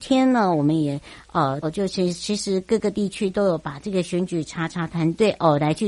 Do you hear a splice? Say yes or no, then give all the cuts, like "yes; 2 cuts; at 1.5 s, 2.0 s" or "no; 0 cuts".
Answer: yes; 1 cut; at 1.6 s